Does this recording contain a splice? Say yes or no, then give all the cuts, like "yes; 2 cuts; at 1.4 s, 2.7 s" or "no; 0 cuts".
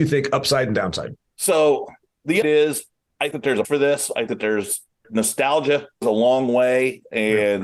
yes; 6 cuts; at 2.4 s, 3.3 s, 3.6 s, 4.3 s, 5.0 s, 6.0 s